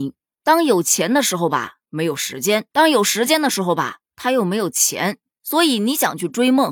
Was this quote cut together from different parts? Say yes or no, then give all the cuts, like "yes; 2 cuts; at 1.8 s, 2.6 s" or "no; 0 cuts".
yes; 1 cut; at 2.7 s